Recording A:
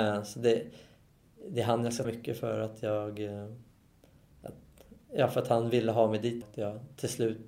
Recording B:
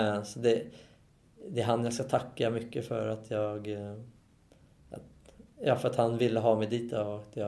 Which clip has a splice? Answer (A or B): A